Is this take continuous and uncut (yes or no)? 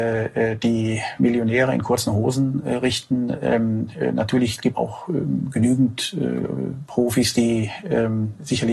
no